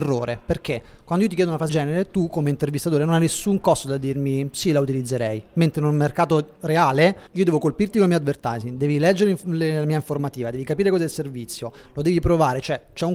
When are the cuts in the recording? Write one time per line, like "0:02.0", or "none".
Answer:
0:01.7
0:07.3